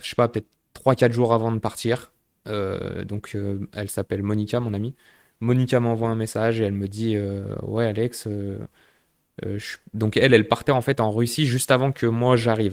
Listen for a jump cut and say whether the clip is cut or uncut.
uncut